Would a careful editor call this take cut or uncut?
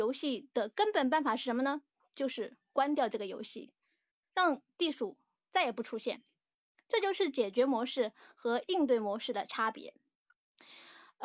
uncut